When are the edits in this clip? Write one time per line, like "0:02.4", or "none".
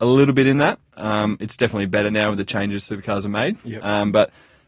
none